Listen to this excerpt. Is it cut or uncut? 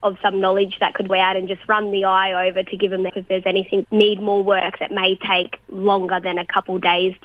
cut